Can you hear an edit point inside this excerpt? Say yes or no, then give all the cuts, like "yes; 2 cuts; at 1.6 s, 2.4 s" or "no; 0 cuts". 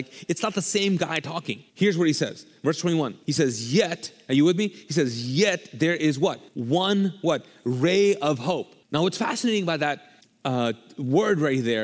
yes; 5 cuts; at 1.7 s, 3.2 s, 6.5 s, 8.8 s, 10.2 s